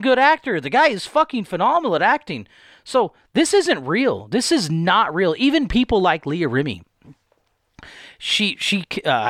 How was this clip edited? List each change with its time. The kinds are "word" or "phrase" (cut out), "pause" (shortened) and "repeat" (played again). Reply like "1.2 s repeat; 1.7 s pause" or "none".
none